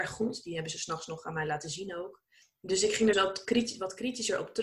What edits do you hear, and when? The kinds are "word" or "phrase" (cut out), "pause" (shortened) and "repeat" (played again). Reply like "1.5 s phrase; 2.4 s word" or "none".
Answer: 3.1 s word